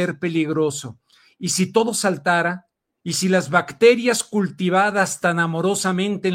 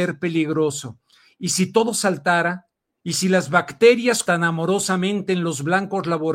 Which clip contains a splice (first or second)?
second